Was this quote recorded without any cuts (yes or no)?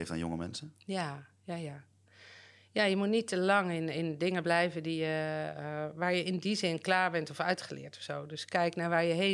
yes